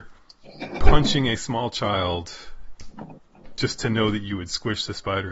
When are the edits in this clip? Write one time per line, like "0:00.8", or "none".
none